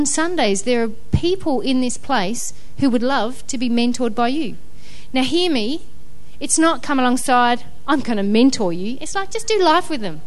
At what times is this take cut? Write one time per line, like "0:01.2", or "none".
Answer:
none